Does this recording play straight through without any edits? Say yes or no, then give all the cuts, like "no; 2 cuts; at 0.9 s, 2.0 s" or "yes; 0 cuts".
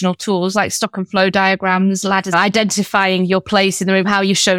no; 1 cut; at 2.3 s